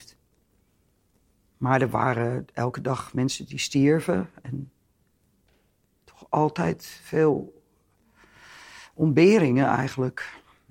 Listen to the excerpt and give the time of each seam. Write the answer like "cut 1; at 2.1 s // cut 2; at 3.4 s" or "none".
none